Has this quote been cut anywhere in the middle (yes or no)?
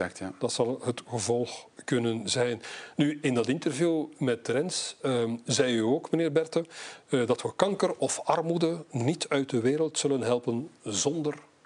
no